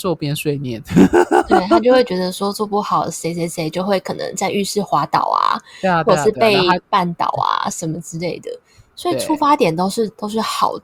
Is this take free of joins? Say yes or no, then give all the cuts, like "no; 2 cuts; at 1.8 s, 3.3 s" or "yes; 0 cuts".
yes; 0 cuts